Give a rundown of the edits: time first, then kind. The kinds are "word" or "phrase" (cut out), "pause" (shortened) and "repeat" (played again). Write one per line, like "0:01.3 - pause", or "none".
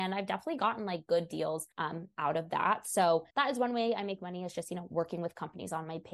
0:01.7 - pause
0:03.3 - pause

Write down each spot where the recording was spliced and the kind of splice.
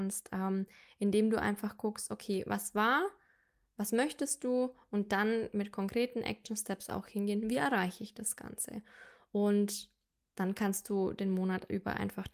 none

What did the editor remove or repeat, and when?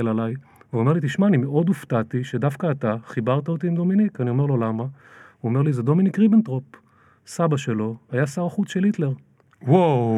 none

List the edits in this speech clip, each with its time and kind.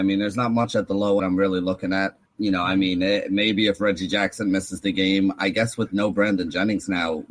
0:01.2 - phrase
0:02.3 - pause

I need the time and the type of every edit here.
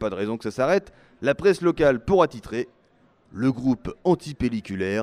none

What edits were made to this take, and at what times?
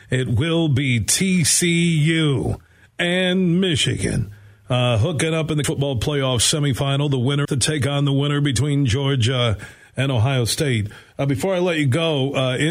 0:05.6 - word
0:07.4 - word

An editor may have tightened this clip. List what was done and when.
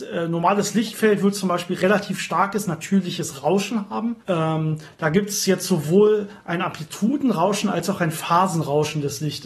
0:04.2 - pause

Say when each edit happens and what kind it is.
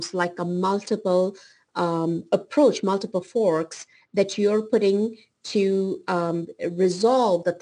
none

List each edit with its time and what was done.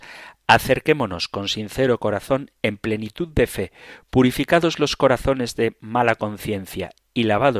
none

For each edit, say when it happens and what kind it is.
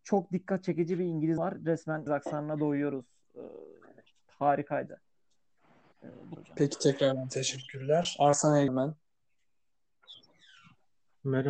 0:01.4 - word
0:02.1 - word
0:06.4 - word
0:08.7 - word

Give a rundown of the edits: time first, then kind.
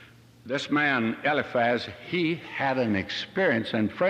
none

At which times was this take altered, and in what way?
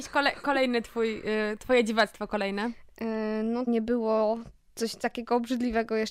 0:03.7 - phrase

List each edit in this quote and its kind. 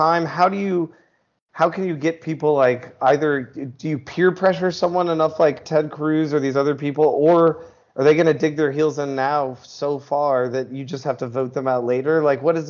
none

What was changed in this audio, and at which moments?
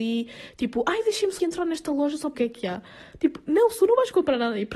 0:01.4 - word
0:02.3 - phrase

